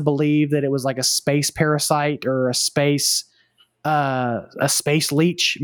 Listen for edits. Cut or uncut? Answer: uncut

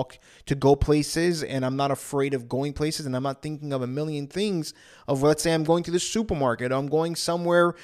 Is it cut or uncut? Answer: uncut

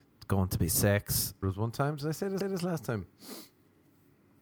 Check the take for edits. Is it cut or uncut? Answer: cut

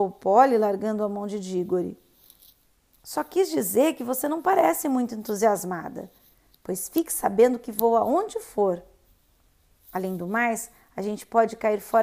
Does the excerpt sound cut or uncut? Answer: uncut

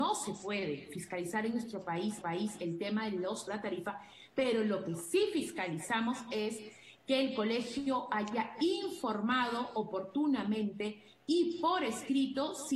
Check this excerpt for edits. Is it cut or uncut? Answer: cut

